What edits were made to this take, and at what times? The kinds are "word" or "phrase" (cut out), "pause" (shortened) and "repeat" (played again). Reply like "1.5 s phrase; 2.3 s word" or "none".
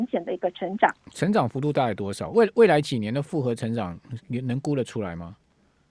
none